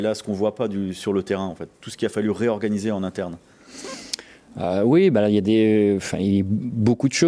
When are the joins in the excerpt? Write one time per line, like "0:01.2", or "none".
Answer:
none